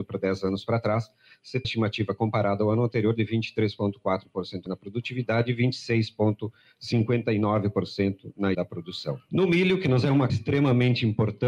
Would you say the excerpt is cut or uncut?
cut